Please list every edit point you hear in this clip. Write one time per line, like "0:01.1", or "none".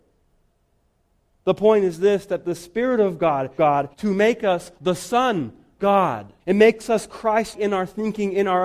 0:03.6
0:03.9
0:04.8
0:05.8
0:06.4
0:07.5